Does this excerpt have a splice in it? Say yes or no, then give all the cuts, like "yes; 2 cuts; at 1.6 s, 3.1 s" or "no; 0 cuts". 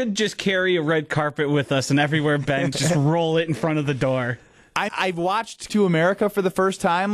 yes; 3 cuts; at 2.7 s, 4.9 s, 5.7 s